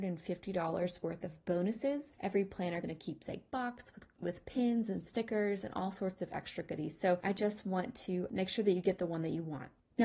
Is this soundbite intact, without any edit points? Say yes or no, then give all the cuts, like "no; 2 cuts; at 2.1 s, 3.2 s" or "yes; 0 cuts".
no; 1 cut; at 2.8 s